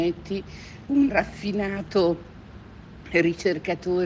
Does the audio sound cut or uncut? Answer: cut